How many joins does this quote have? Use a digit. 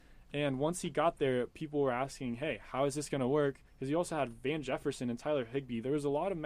1